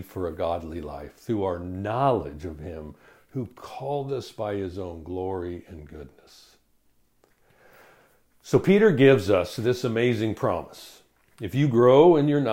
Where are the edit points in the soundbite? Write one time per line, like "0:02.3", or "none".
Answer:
none